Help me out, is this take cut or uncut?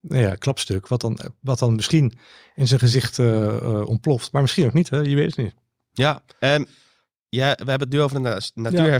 cut